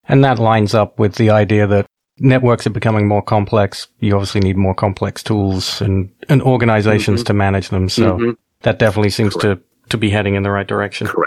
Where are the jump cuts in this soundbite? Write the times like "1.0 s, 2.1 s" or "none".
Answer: none